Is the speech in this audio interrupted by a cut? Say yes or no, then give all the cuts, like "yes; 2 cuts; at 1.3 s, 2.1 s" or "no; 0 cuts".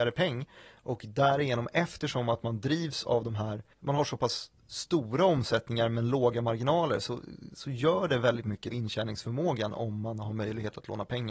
yes; 2 cuts; at 3.7 s, 8.7 s